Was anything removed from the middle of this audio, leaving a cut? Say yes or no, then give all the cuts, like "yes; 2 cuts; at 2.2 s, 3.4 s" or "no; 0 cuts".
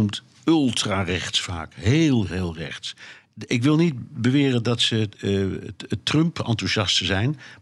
yes; 2 cuts; at 2.3 s, 5.1 s